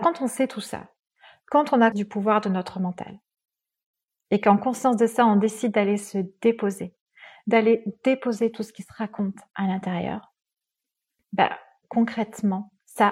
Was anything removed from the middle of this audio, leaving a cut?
yes; 1 cut; at 1.9 s

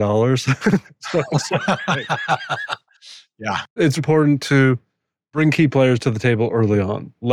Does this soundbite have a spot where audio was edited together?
yes; 1 cut; at 4.0 s

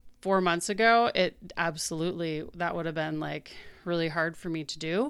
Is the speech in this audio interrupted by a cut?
no; 0 cuts

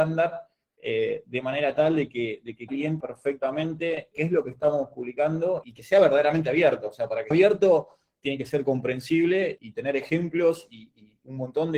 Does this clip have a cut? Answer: yes; 6 cuts; at 2.7 s, 3.0 s, 4.1 s, 5.6 s, 7.3 s, 9.6 s

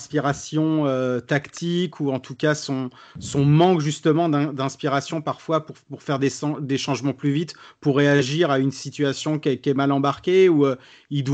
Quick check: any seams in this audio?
no; 0 cuts

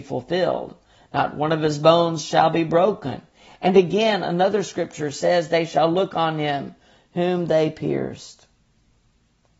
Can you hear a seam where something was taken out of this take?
no; 0 cuts

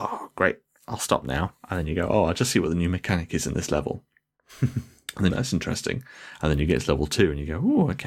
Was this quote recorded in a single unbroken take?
no; 1 cut; at 5.3 s

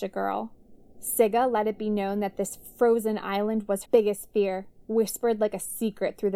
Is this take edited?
yes; 2 cuts; at 3.8 s, 4.9 s

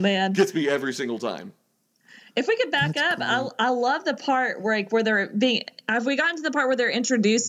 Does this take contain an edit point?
no; 0 cuts

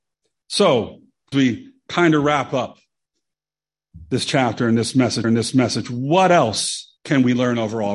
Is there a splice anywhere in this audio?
yes; 3 cuts; at 1.3 s, 5.2 s, 7.0 s

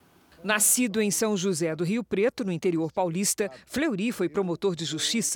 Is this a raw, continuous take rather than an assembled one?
yes; 0 cuts

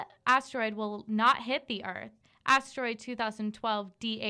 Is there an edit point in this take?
no; 0 cuts

